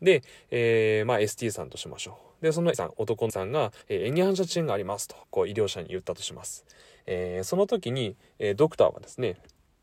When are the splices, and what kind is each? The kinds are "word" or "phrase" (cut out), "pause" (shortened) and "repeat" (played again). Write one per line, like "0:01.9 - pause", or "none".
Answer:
0:02.7 - word
0:03.3 - word
0:03.8 - pause
0:05.2 - pause